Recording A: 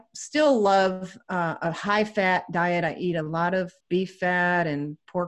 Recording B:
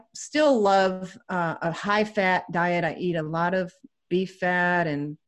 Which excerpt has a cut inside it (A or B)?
A